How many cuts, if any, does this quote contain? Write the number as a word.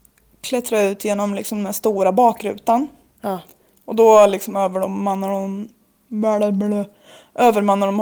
zero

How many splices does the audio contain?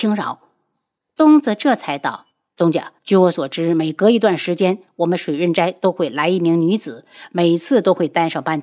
two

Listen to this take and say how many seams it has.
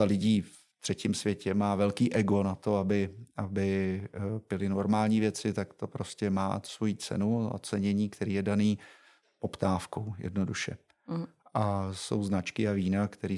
zero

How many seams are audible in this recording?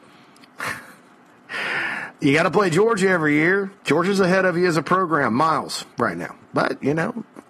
three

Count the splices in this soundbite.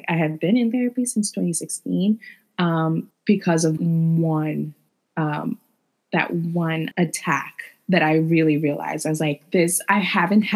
four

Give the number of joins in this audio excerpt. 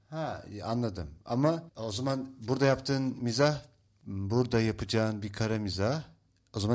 one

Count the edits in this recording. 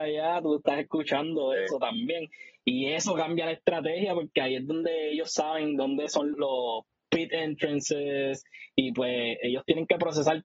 one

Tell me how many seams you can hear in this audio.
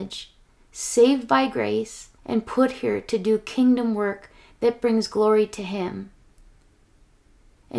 one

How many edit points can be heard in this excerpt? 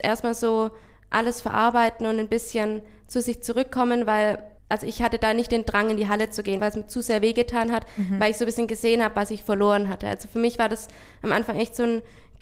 two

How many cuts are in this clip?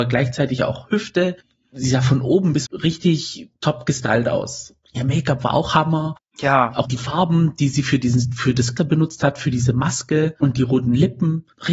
three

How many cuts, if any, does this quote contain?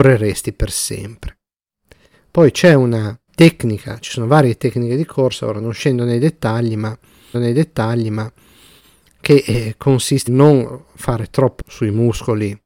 four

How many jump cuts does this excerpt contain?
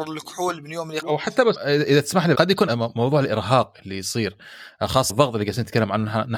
five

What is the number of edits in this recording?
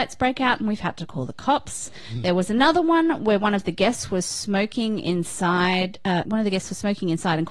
one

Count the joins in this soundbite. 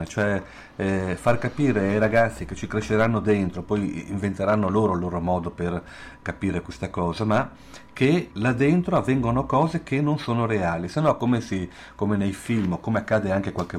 one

